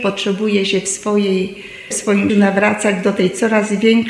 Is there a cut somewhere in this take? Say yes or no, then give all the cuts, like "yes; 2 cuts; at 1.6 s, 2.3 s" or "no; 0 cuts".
yes; 2 cuts; at 1.9 s, 2.3 s